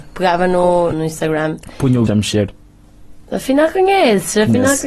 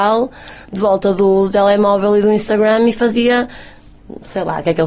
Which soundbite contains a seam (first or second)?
first